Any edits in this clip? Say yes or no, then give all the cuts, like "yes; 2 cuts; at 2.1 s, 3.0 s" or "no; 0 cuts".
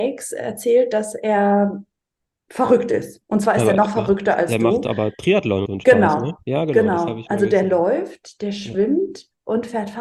yes; 1 cut; at 5.7 s